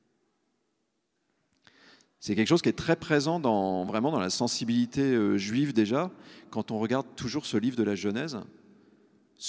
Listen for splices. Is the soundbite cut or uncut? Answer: uncut